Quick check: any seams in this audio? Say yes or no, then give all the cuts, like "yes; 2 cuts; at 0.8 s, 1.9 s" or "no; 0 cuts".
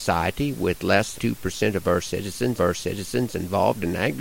yes; 2 cuts; at 1.1 s, 2.6 s